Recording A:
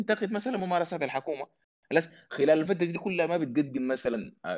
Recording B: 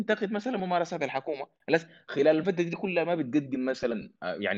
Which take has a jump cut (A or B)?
B